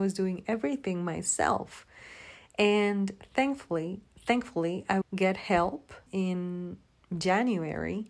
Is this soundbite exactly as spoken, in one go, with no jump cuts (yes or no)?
no